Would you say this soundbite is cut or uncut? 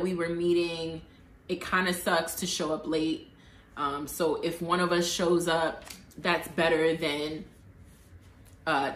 uncut